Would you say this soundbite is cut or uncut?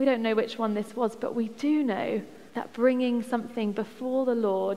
cut